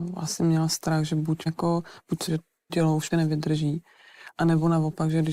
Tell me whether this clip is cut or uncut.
cut